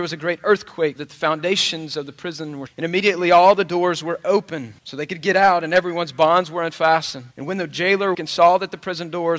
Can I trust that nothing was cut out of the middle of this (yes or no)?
no